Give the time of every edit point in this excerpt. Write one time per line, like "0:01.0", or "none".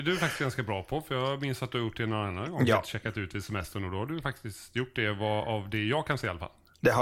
none